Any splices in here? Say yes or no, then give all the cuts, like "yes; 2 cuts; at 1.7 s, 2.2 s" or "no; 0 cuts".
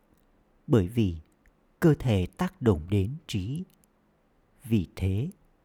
yes; 1 cut; at 3.2 s